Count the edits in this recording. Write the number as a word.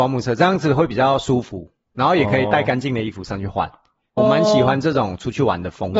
one